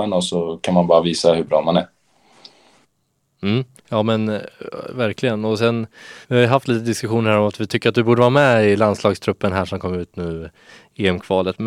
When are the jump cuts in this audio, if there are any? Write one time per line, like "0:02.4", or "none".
0:03.8
0:06.2